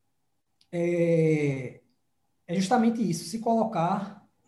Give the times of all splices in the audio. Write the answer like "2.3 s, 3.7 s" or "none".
none

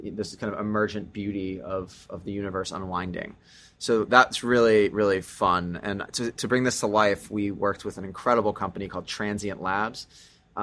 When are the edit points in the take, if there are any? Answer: none

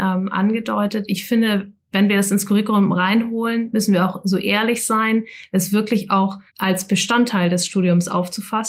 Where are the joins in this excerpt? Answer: 6.5 s

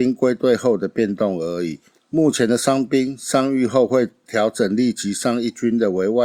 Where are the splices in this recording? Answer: 1.9 s

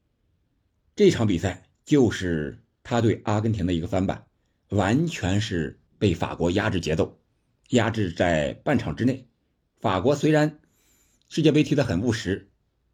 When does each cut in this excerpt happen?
1.7 s, 5.9 s

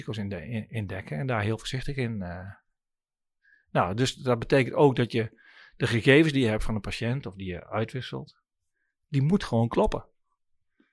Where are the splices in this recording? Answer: none

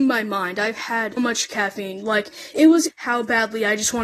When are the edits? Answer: 1.2 s, 2.5 s, 2.9 s

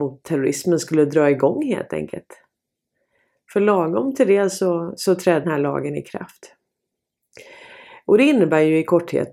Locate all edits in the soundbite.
5.4 s

